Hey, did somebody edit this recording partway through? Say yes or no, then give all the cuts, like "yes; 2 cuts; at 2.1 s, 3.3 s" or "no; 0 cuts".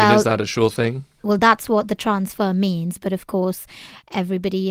no; 0 cuts